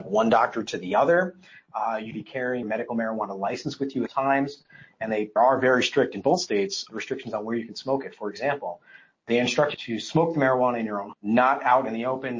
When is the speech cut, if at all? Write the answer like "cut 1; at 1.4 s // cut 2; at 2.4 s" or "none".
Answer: cut 1; at 2.1 s // cut 2; at 2.6 s // cut 3; at 4.1 s // cut 4; at 5.4 s // cut 5; at 6.9 s // cut 6; at 9.7 s // cut 7; at 11.1 s